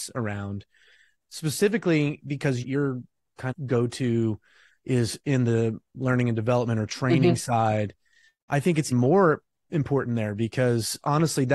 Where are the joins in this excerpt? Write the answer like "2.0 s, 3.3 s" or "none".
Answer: 2.6 s, 3.5 s, 8.5 s, 8.9 s